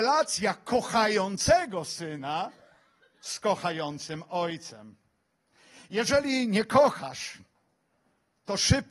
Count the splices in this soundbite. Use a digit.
0